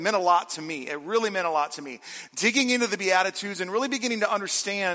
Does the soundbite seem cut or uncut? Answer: uncut